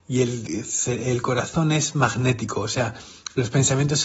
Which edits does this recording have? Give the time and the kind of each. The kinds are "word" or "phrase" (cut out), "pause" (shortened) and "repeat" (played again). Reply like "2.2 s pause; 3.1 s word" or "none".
none

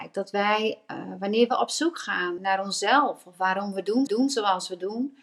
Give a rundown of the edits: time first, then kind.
2.4 s word; 4.1 s repeat

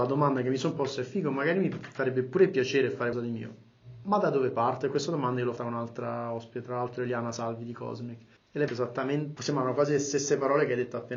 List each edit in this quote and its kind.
3.1 s word; 5.6 s word; 8.4 s pause; 8.7 s word; 9.4 s word

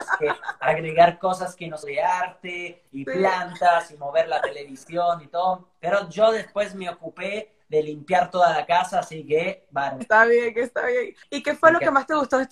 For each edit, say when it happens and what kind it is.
1.8 s phrase; 10.0 s word

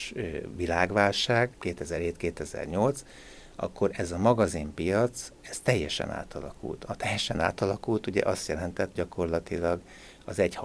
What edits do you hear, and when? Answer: 8.9 s word

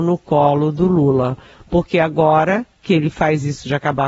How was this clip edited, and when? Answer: none

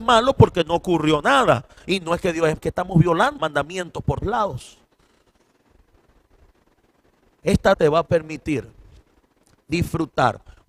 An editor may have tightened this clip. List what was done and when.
2.6 s word; 3.4 s word; 4.2 s word; 7.7 s word

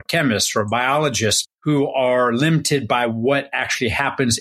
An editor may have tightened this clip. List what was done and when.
1.5 s pause

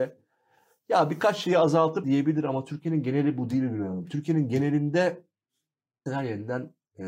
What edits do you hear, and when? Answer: 2.0 s word; 6.1 s word

